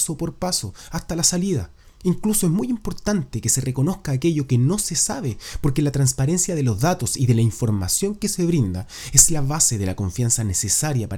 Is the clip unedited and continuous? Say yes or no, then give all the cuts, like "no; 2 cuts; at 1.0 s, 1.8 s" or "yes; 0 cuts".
yes; 0 cuts